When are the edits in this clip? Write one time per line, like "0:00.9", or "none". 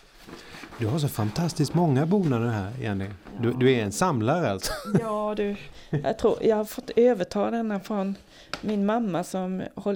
none